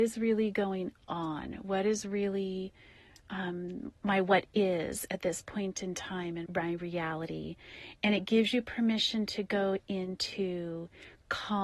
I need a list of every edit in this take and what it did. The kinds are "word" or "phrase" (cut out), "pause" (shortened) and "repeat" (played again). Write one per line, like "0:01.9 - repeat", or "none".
0:06.5 - word

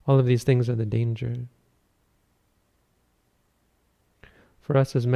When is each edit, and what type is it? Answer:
none

